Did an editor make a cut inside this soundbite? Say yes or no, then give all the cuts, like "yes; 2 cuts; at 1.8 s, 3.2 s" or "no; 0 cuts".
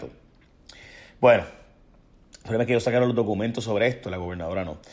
no; 0 cuts